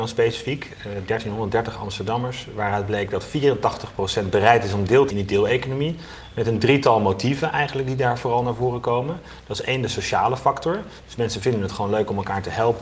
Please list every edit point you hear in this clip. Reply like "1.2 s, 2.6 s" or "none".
5.1 s